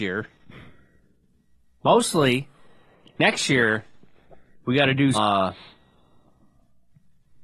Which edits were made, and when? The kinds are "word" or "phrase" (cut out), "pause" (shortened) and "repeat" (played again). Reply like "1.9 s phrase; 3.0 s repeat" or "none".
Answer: 4.5 s pause; 5.1 s word